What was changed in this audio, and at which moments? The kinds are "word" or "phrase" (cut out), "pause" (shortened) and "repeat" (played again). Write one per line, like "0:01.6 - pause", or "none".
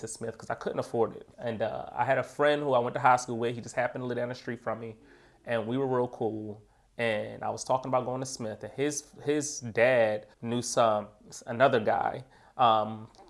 0:01.3 - pause
0:10.3 - pause